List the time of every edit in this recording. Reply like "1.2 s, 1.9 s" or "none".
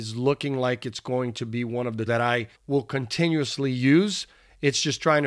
2.1 s, 2.5 s

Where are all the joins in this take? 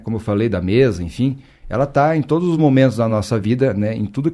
none

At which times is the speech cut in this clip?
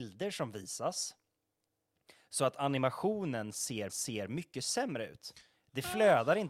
3.9 s

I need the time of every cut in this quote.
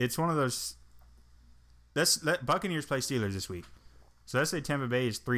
none

